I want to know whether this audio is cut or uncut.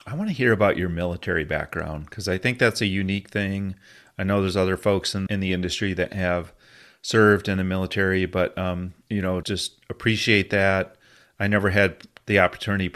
cut